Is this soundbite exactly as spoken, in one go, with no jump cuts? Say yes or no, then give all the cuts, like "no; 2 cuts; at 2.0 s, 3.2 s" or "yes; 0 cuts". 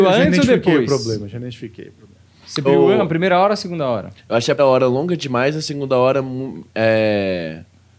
no; 2 cuts; at 2.6 s, 4.6 s